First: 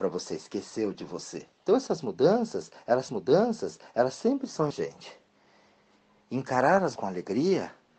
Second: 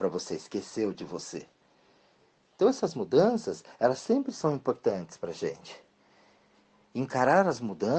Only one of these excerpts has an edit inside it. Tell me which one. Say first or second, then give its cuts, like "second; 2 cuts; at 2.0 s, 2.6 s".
first; 4 cuts; at 1.5 s, 3.1 s, 4.7 s, 7.0 s